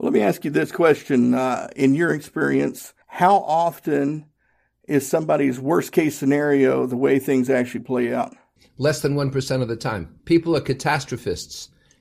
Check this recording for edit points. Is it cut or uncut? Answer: cut